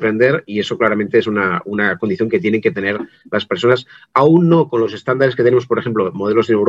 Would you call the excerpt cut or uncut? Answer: uncut